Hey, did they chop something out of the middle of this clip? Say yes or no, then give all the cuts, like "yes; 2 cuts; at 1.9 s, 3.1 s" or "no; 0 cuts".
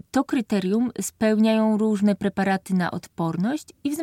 no; 0 cuts